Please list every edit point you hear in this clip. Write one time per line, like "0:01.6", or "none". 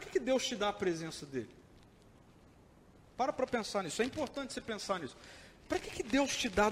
none